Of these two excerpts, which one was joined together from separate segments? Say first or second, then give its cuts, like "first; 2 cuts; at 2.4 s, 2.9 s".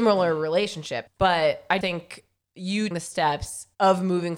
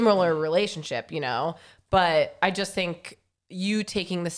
first; 3 cuts; at 1.1 s, 1.8 s, 2.9 s